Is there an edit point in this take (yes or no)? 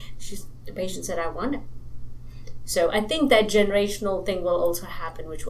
no